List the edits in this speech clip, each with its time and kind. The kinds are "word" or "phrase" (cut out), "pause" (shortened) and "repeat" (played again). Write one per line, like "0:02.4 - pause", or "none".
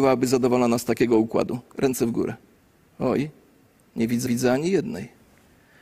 0:02.6 - pause
0:04.3 - repeat